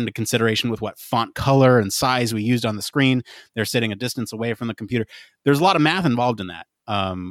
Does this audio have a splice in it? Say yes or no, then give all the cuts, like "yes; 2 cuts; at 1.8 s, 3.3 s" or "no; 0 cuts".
no; 0 cuts